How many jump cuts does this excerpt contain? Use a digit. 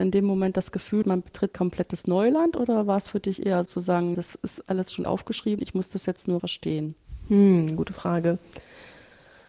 8